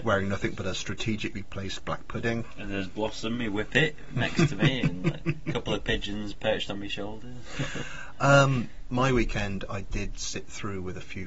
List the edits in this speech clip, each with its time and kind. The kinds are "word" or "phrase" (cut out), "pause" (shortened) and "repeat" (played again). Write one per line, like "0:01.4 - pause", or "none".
none